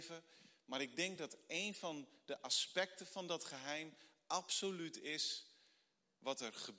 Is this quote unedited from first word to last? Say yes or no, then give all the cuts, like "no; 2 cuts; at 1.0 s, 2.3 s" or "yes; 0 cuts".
yes; 0 cuts